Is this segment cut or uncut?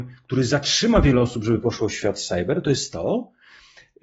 uncut